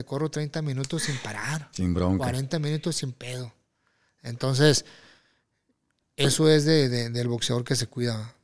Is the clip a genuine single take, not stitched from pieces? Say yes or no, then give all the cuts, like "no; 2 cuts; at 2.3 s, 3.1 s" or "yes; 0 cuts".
yes; 0 cuts